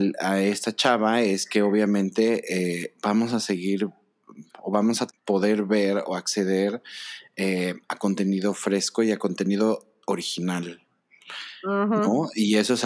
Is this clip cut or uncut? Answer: cut